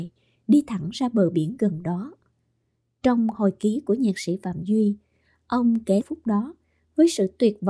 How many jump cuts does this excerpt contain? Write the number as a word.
one